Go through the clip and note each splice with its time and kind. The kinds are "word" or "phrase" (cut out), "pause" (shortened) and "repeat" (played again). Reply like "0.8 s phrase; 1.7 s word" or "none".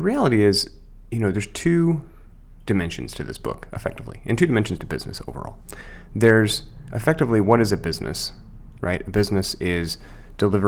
none